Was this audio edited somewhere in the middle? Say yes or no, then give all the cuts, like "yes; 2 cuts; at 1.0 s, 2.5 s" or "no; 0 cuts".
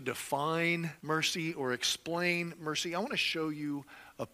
yes; 1 cut; at 1.0 s